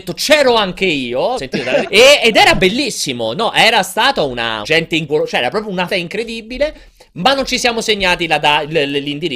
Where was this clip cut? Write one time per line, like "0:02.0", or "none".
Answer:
0:01.4
0:01.8
0:04.6
0:05.1
0:05.9